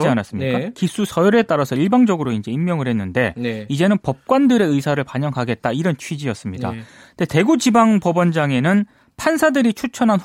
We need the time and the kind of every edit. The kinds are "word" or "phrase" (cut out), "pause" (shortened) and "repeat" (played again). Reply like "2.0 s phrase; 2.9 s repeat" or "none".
none